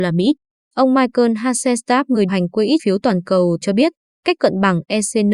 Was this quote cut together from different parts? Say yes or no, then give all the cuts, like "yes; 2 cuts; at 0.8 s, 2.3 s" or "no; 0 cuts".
yes; 4 cuts; at 2.3 s, 2.8 s, 3.6 s, 4.4 s